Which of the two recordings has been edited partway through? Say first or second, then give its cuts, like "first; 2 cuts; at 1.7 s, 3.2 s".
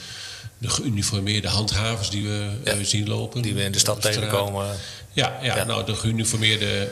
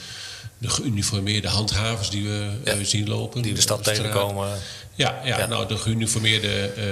second; 1 cut; at 3.6 s